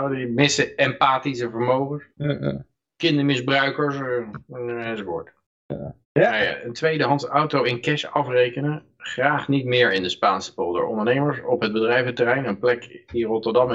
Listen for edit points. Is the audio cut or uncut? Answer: cut